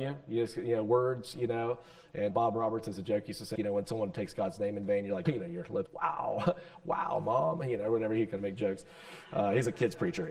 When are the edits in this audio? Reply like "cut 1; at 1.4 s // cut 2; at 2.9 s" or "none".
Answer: cut 1; at 2.3 s // cut 2; at 3.6 s // cut 3; at 5.3 s // cut 4; at 5.9 s